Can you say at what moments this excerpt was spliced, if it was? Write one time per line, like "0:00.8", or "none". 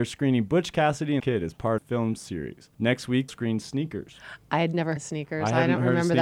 0:01.2
0:01.8
0:02.7
0:03.3
0:05.0